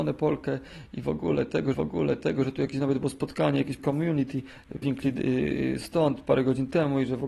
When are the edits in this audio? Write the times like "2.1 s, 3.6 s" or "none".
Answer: 1.7 s, 3.8 s, 4.8 s